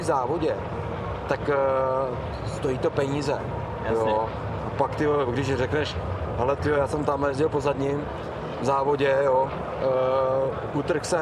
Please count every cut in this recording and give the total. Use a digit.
0